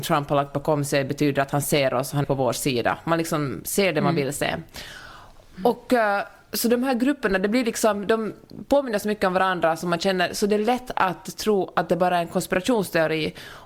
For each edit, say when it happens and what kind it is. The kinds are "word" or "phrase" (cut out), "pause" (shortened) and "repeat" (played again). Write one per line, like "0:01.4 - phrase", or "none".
0:02.2 - word